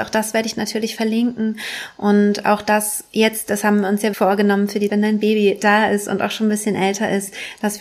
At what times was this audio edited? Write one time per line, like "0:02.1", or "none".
0:04.1
0:04.9

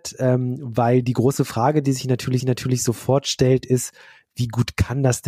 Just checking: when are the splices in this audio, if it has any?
0:02.4

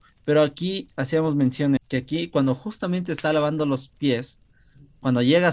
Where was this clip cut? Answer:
0:01.8

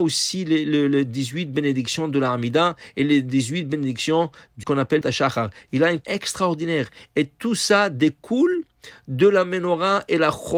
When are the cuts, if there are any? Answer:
0:04.6
0:05.0
0:06.0

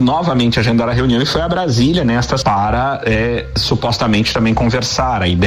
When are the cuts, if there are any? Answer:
0:02.4

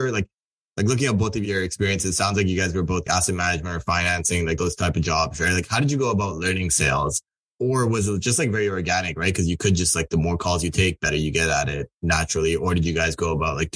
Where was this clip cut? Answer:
0:03.1

